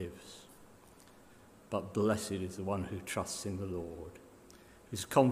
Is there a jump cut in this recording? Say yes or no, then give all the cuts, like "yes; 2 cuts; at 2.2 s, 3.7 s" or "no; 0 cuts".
no; 0 cuts